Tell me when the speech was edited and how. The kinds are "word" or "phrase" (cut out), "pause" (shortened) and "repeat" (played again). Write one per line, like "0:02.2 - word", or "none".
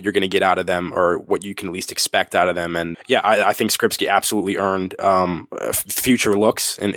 0:02.9 - word